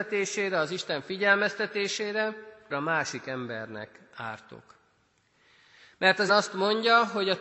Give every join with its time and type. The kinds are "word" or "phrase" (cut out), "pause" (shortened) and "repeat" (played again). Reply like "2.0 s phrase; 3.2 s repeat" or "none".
2.7 s word; 6.3 s word